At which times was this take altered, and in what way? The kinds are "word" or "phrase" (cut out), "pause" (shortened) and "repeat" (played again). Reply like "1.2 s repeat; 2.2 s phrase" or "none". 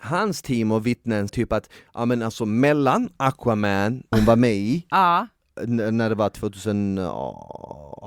1.3 s word; 4.1 s word